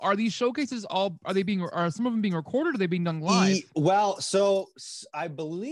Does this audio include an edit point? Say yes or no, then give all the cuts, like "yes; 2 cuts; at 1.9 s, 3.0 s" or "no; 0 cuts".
no; 0 cuts